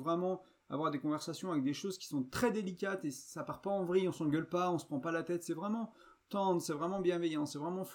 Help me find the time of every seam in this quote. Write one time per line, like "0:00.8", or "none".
none